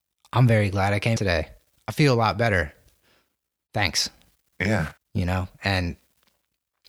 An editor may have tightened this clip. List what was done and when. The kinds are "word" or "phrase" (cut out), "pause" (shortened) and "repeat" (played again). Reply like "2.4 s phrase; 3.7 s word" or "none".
1.2 s word; 5.0 s pause